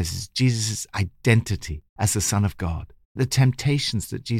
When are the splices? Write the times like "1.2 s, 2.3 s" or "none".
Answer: 1.9 s, 3.2 s

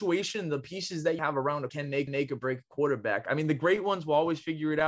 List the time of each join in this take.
1.2 s, 1.7 s, 2.1 s

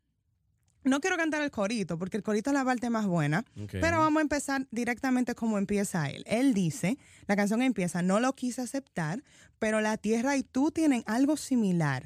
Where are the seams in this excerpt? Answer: none

